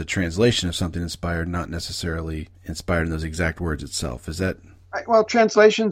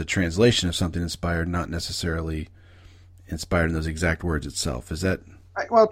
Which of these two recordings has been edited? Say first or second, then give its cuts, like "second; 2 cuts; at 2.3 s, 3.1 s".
first; 1 cut; at 2.5 s